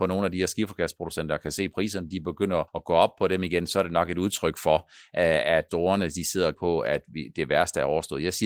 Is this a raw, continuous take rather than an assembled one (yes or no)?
no